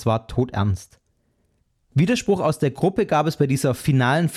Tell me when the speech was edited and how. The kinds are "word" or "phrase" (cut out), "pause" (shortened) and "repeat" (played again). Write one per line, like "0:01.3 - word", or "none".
none